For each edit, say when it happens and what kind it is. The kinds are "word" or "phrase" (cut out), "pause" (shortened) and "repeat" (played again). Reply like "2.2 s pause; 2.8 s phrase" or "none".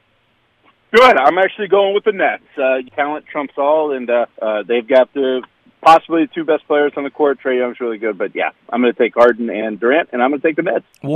2.9 s phrase; 4.3 s pause; 9.8 s word

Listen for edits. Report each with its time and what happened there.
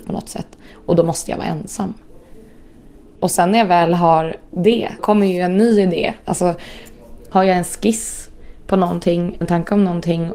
5.0 s word; 9.4 s word

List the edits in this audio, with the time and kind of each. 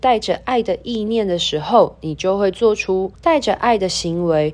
3.1 s pause

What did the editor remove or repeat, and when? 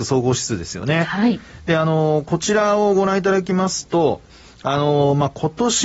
none

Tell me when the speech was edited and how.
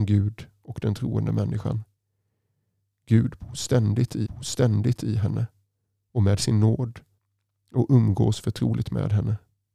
4.2 s repeat; 7.2 s pause

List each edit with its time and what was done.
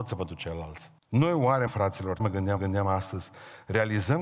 1.0 s pause; 1.7 s word; 2.2 s word; 2.6 s repeat

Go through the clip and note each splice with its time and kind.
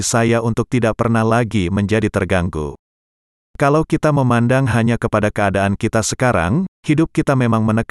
6.7 s pause

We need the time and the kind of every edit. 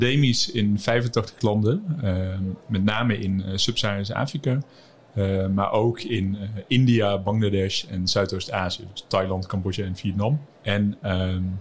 10.5 s pause

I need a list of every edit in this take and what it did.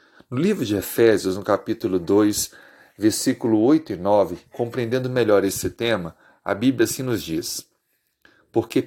none

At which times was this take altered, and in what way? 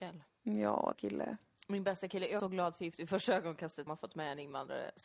0.9 s phrase; 2.4 s phrase; 3.9 s phrase

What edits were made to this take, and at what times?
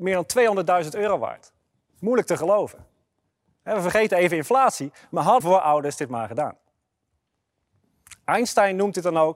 5.4 s word

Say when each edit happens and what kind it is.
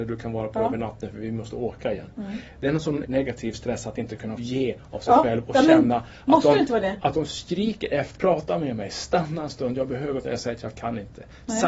3.0 s word; 4.4 s word; 8.1 s word; 10.2 s word

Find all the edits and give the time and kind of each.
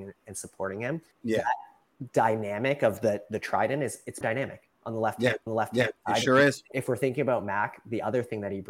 1.1 s pause; 4.2 s word; 4.7 s pause; 5.5 s repeat; 6.7 s phrase

